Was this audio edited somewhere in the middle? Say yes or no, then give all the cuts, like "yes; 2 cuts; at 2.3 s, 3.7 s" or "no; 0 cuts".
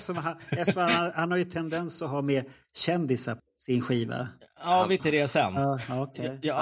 yes; 2 cuts; at 3.4 s, 5.0 s